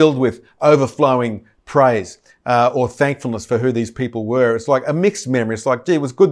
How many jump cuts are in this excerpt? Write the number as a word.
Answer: zero